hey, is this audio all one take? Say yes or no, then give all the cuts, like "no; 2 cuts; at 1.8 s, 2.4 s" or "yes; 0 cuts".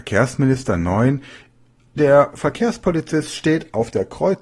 yes; 0 cuts